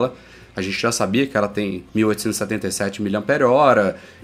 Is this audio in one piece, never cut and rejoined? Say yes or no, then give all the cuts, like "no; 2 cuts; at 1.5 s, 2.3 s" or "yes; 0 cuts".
no; 1 cut; at 1.9 s